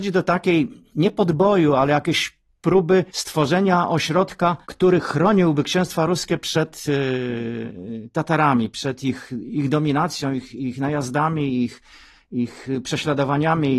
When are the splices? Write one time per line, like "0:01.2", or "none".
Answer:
0:03.1
0:04.6

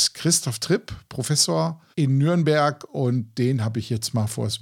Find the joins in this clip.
0:01.9

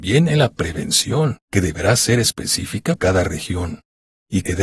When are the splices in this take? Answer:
0:01.4
0:03.0

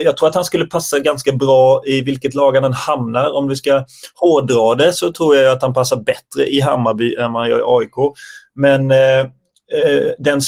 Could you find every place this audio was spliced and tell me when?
none

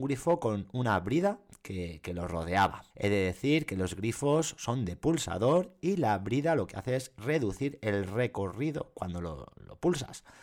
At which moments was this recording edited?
0:02.9

